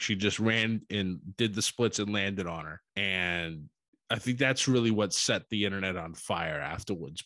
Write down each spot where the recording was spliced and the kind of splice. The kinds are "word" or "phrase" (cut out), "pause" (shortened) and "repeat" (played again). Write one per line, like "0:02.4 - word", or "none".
0:02.9 - pause